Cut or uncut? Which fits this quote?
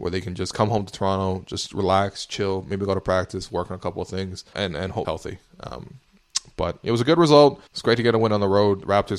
cut